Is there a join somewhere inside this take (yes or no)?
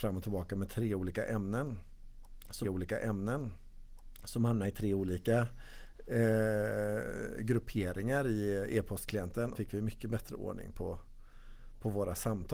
yes